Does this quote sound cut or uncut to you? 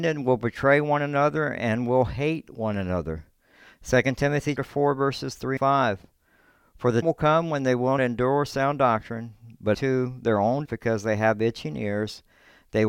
cut